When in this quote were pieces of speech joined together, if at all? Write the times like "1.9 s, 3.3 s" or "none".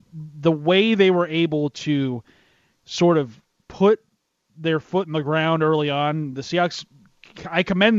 none